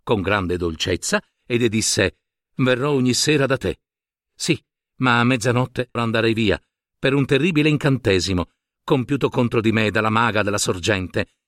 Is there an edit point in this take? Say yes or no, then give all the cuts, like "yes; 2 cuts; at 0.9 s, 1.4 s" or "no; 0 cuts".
yes; 1 cut; at 6.0 s